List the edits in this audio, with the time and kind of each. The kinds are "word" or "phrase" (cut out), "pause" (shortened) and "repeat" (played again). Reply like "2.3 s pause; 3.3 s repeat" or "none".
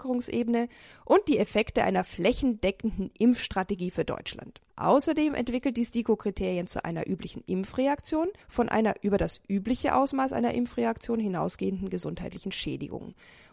4.7 s pause; 6.8 s word; 8.4 s pause